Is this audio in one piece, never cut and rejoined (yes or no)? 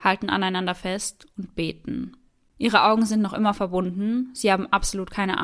yes